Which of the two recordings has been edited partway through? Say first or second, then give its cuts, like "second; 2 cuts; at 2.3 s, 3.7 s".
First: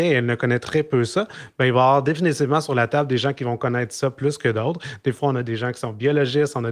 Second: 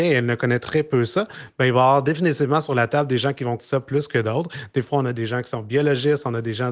second; 1 cut; at 3.6 s